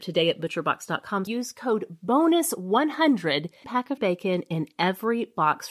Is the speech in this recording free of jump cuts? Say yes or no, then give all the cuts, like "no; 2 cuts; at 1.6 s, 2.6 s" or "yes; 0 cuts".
no; 3 cuts; at 1.3 s, 3.6 s, 4.0 s